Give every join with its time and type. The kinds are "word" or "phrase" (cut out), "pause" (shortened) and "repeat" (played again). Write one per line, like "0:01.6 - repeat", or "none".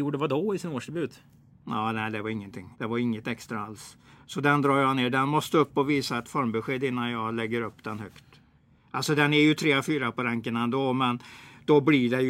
0:02.7 - pause